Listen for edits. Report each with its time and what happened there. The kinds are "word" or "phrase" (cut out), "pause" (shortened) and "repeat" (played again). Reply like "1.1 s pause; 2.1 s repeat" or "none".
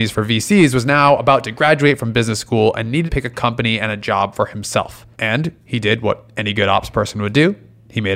3.1 s word; 5.1 s pause